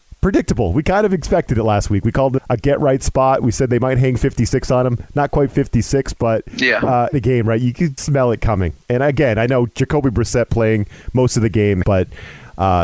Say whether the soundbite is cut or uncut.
cut